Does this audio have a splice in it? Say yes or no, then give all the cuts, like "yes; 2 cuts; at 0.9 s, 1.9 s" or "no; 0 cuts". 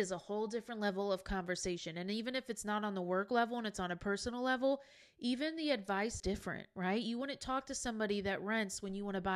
yes; 1 cut; at 6.2 s